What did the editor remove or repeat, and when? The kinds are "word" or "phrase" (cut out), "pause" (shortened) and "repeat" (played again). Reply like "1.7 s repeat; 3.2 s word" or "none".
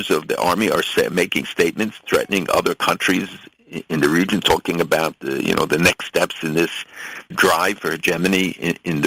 7.3 s word